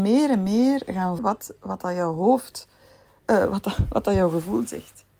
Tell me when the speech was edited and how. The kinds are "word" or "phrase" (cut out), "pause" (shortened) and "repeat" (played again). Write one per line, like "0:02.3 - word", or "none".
0:01.2 - word